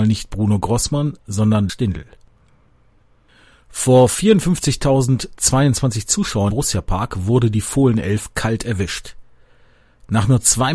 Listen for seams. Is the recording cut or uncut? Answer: cut